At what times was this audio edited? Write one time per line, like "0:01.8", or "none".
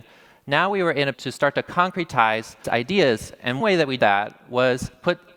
0:01.1
0:02.6
0:03.6
0:04.0